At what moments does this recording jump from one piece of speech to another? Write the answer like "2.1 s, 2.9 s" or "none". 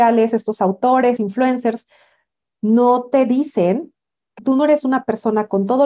1.2 s, 4.4 s